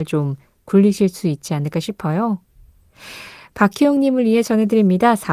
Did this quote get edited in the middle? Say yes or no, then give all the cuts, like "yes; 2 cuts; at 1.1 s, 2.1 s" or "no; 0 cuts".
no; 0 cuts